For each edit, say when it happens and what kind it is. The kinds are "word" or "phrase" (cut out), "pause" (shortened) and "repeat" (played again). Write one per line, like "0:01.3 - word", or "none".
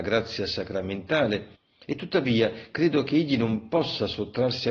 0:01.5 - pause